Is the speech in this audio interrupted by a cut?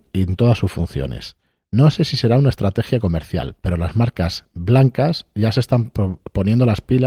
no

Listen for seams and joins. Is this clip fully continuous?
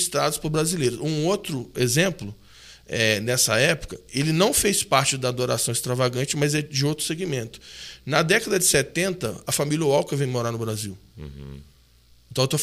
yes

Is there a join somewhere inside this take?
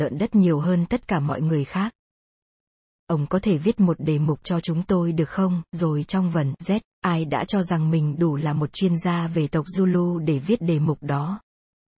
no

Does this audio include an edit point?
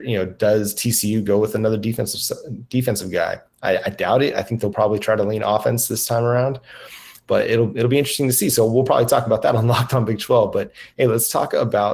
no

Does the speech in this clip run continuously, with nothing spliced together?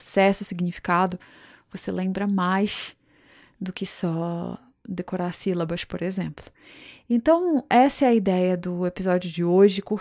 yes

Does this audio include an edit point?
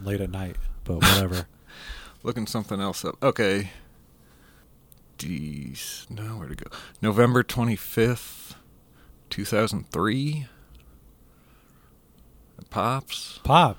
no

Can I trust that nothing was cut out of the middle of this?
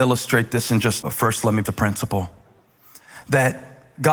no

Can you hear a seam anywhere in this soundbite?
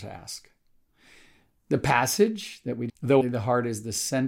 yes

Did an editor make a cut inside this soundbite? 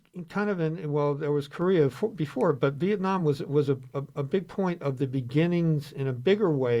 no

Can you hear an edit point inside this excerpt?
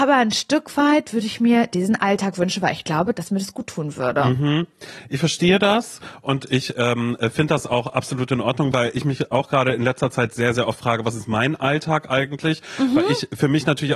no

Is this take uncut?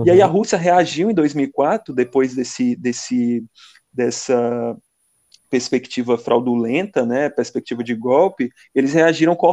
yes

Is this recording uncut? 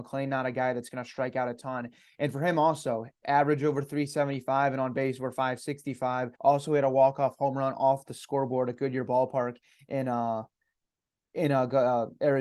no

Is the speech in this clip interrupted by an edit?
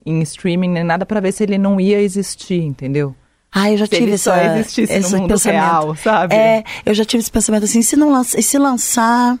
no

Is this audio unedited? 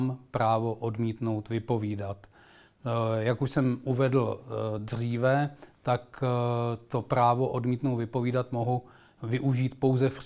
yes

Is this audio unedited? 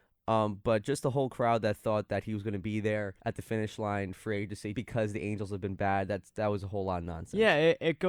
no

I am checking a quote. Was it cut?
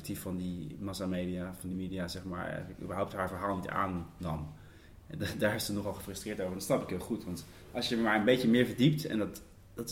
yes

